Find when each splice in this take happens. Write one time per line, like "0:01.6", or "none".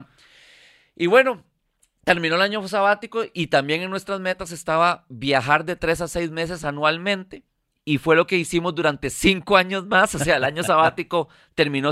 none